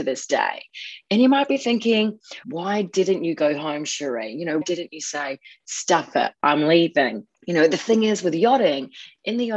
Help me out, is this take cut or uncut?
cut